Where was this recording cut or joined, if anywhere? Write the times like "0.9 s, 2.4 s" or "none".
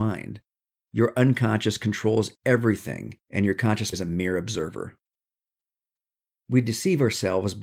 3.2 s, 3.9 s